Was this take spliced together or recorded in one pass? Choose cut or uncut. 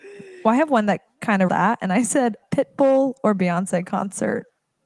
cut